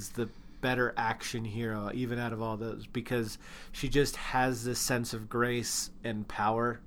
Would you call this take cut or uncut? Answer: uncut